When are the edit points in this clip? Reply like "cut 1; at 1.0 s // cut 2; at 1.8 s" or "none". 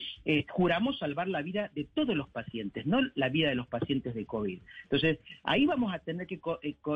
none